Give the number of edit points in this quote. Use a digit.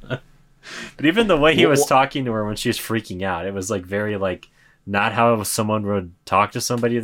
0